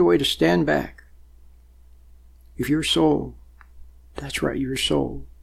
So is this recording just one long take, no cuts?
yes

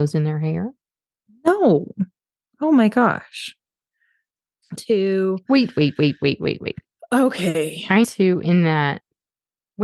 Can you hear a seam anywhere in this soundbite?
yes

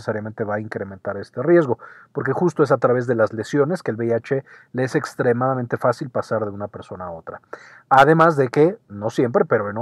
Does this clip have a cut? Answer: no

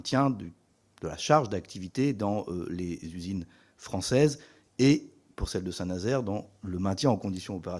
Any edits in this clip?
no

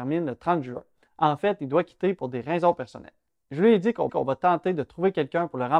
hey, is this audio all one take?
no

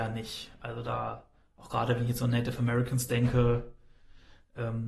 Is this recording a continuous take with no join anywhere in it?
yes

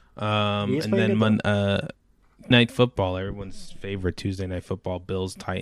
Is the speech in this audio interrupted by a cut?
yes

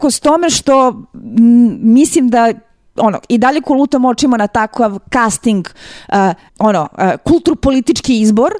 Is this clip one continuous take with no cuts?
no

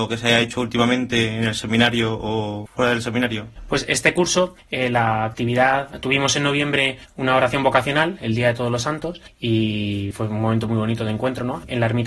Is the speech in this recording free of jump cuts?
yes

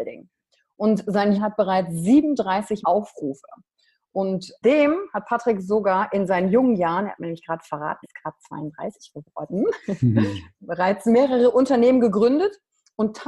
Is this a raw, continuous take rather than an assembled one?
no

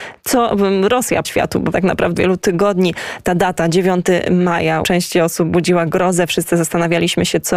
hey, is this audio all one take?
no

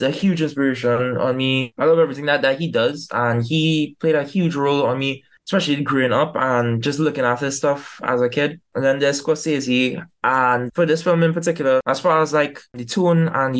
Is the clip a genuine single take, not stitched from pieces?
no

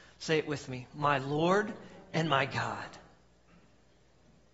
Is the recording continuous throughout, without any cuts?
yes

